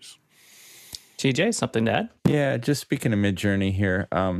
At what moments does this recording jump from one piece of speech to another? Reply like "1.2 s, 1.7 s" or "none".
2.2 s